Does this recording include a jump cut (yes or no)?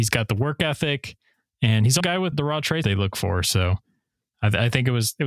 yes